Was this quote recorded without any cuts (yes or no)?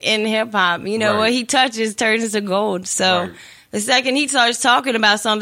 yes